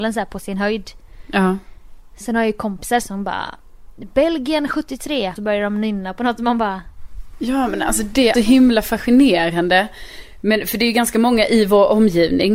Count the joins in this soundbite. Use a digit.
3